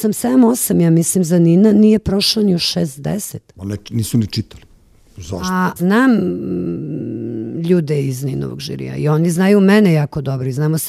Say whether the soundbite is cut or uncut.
cut